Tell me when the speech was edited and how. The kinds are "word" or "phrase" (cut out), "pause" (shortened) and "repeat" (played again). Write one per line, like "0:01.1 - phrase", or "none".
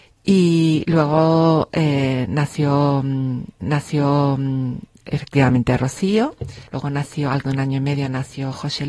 0:03.6 - repeat
0:06.7 - pause
0:07.4 - word